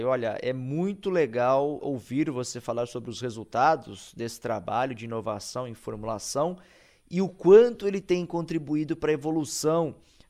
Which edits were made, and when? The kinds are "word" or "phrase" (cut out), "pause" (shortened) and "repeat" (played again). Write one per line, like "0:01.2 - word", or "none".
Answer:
0:01.8 - word